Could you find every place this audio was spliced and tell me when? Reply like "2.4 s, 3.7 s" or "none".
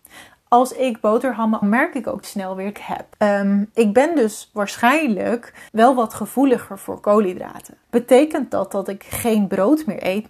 1.6 s, 2.2 s, 2.7 s, 3.1 s, 5.7 s, 7.8 s